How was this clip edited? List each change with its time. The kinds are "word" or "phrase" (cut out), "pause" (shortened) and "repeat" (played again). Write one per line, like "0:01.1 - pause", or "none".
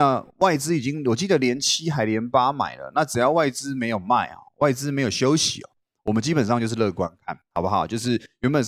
none